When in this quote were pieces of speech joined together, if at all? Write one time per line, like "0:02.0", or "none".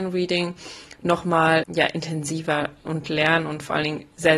0:01.6
0:02.8

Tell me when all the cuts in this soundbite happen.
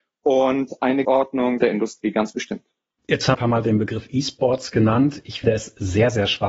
0:01.0
0:01.6
0:03.3
0:05.4

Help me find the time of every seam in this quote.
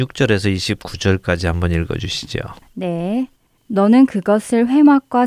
none

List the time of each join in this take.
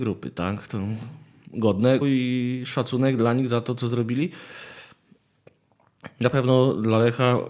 0:02.0

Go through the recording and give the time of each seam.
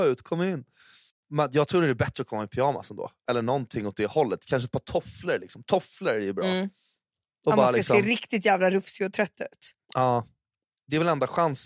0:09.8

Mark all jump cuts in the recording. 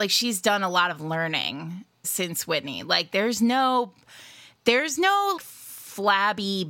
0:02.0
0:05.4

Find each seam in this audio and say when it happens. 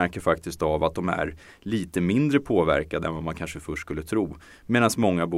none

